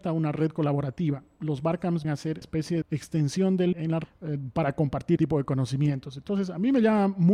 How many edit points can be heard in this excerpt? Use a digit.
6